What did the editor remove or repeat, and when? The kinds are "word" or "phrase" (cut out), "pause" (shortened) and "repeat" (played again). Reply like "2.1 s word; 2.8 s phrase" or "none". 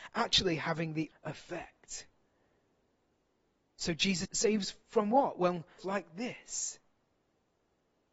1.1 s word; 4.2 s word; 5.8 s word